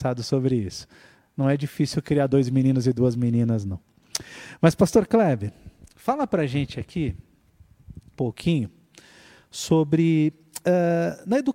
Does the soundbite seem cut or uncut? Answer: cut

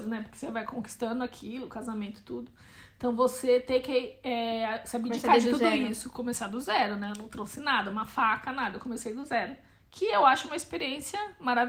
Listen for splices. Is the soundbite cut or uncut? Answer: uncut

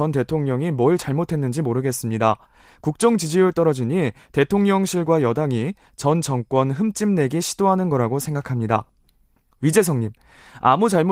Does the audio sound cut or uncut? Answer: uncut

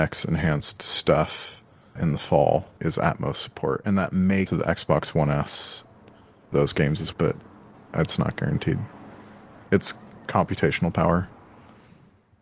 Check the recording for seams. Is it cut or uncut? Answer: cut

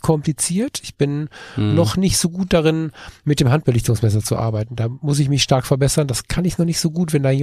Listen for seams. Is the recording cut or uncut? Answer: uncut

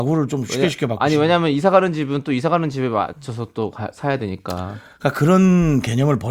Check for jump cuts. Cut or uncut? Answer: uncut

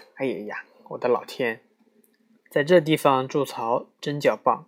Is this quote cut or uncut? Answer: uncut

